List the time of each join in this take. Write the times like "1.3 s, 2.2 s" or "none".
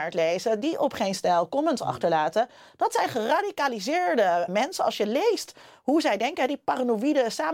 4.5 s